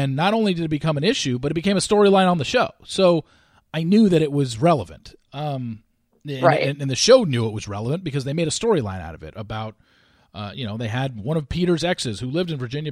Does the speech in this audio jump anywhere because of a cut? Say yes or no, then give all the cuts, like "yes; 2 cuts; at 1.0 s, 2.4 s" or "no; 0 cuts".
no; 0 cuts